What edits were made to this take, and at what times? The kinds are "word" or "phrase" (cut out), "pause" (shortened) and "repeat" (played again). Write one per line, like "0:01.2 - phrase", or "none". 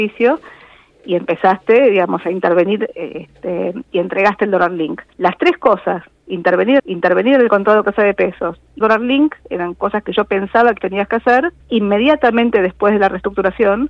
0:03.9 - word
0:05.1 - pause
0:06.8 - repeat
0:07.8 - phrase
0:08.8 - word
0:10.8 - word
0:11.6 - pause